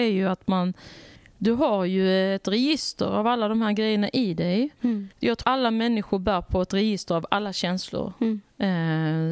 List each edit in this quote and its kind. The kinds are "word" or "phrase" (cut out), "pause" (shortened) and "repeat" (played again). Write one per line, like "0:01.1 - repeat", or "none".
0:01.2 - pause
0:05.1 - pause
0:05.4 - word

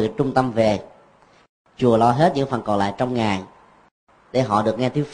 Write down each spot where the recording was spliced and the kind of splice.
none

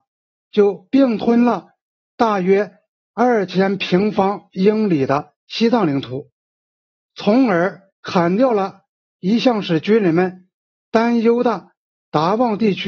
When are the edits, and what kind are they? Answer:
0:05.4 - pause
0:07.9 - pause

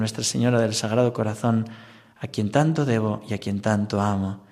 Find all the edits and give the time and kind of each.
none

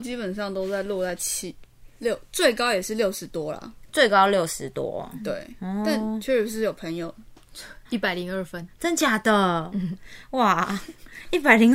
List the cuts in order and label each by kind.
0:07.8 - pause

